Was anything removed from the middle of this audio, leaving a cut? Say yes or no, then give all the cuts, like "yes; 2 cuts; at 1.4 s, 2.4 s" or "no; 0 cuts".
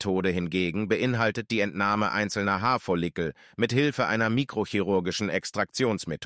no; 0 cuts